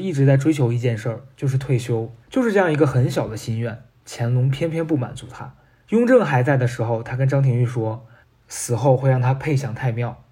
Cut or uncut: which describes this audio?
cut